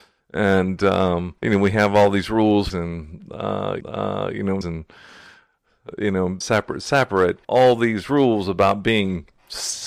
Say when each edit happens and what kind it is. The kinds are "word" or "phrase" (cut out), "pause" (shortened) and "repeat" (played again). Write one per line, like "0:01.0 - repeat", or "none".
0:01.4 - pause
0:02.7 - phrase
0:03.8 - repeat
0:04.6 - phrase
0:06.4 - word
0:07.4 - pause